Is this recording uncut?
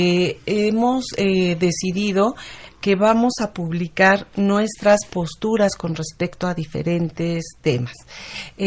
yes; 0 cuts

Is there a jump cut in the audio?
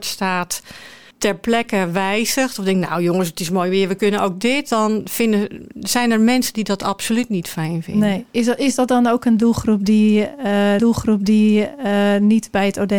yes; 2 cuts; at 1.1 s, 10.8 s

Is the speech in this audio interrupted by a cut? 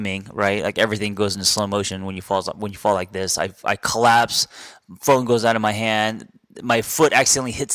no; 0 cuts

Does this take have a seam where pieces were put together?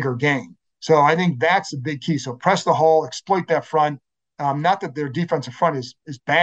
no; 0 cuts

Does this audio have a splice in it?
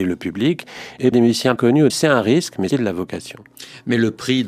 yes; 4 cuts; at 1.1 s, 1.6 s, 1.9 s, 2.7 s

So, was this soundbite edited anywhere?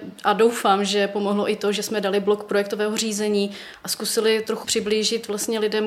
yes; 1 cut; at 4.6 s

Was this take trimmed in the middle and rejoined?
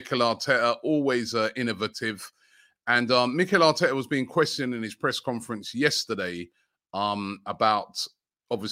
no; 0 cuts

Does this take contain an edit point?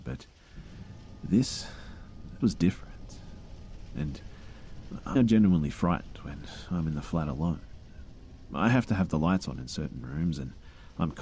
yes; 2 cuts; at 2.4 s, 5.2 s

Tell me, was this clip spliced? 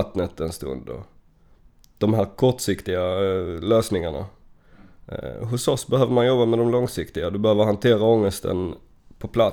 no; 0 cuts

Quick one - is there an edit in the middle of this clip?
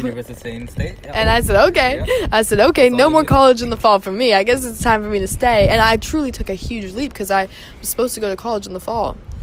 no; 0 cuts

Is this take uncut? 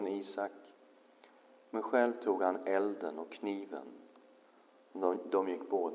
yes; 0 cuts

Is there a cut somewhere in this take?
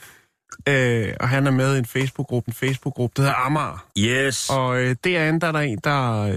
yes; 2 cuts; at 2.5 s, 3.9 s

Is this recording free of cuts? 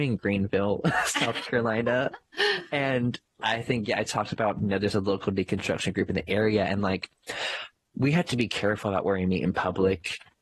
yes; 0 cuts

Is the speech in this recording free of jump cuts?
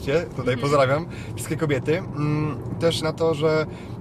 no; 1 cut; at 3.0 s

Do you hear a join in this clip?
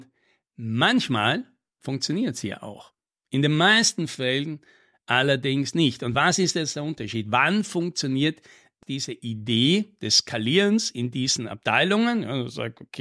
no; 0 cuts

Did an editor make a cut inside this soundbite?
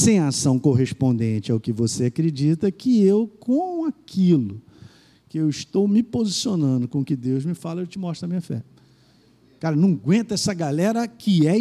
no; 0 cuts

